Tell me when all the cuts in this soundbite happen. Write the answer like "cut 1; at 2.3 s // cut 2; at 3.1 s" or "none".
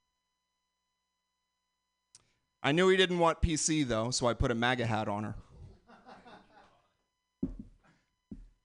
none